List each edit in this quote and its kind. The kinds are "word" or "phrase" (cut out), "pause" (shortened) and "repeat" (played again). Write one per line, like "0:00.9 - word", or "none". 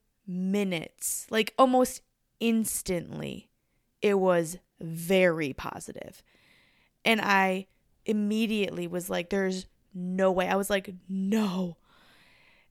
none